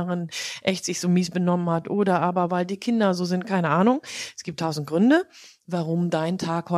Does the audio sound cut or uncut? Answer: uncut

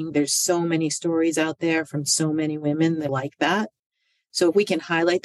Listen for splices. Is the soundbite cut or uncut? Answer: cut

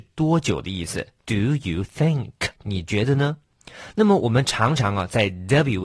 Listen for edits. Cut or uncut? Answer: cut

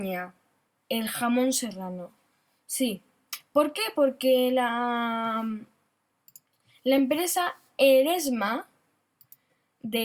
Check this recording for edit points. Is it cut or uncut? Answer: uncut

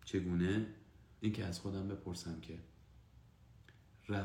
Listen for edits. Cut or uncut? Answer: cut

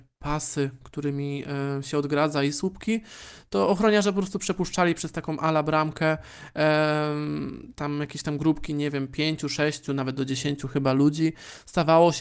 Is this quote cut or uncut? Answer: uncut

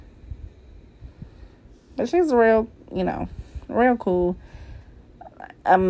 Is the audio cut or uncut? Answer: uncut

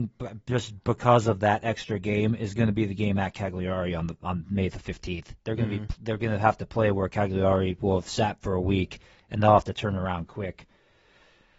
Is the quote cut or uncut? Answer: uncut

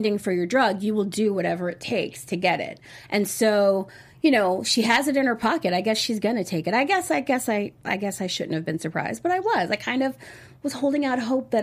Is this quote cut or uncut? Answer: uncut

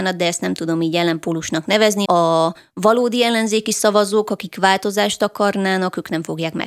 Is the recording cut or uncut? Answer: cut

